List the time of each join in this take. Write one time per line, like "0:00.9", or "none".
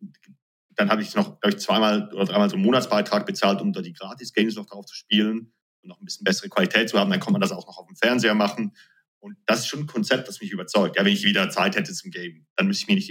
none